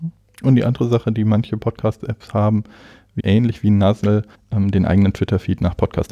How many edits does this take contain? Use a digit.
2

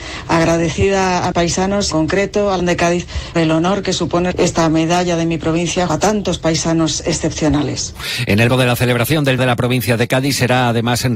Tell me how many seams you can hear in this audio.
8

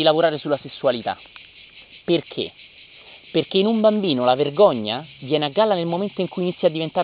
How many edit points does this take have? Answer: 0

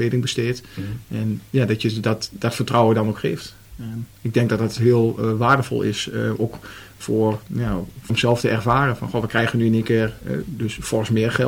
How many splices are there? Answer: 2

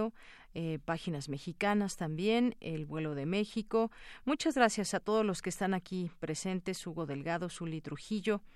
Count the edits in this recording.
0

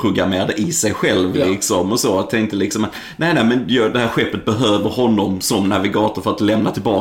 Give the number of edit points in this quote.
0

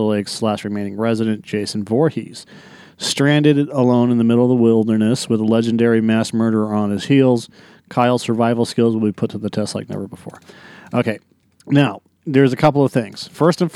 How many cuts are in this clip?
0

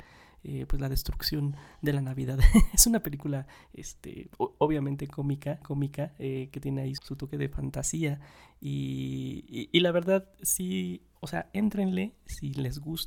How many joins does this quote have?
3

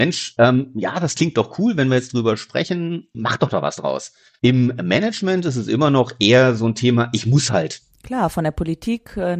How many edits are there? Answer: 0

